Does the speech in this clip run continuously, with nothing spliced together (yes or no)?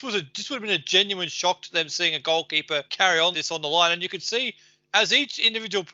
no